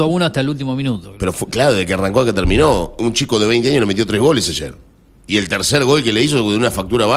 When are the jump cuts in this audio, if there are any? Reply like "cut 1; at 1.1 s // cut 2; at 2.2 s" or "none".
none